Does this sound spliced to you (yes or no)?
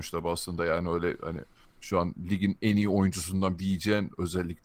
yes